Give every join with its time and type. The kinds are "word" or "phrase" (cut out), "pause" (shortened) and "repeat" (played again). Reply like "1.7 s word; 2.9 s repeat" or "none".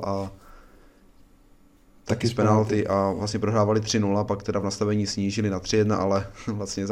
none